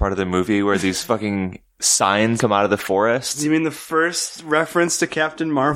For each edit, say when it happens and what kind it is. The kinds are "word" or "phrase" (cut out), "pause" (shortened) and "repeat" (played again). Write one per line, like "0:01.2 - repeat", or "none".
0:02.4 - word